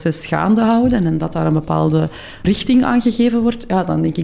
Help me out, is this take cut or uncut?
cut